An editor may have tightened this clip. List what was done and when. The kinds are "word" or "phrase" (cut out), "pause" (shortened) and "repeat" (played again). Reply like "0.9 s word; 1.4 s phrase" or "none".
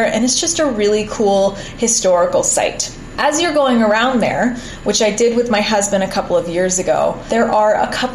none